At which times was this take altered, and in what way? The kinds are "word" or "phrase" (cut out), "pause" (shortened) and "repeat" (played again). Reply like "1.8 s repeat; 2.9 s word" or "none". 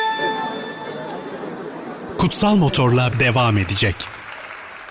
3.1 s phrase